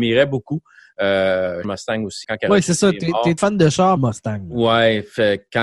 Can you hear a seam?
yes; 4 cuts; at 1.6 s, 2.2 s, 3.4 s, 4.0 s

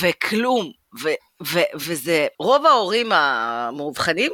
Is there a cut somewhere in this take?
yes; 1 cut; at 2.3 s

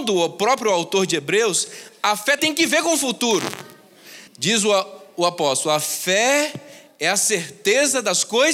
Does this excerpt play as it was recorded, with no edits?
no; 2 cuts; at 2.4 s, 4.3 s

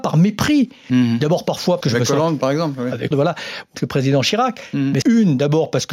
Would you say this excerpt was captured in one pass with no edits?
no; 4 cuts; at 1.8 s, 3.1 s, 3.7 s, 5.0 s

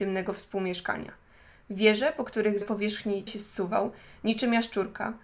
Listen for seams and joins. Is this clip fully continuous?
no; 2 cuts; at 2.6 s, 3.3 s

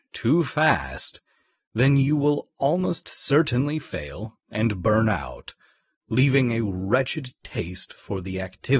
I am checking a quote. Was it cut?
no; 0 cuts

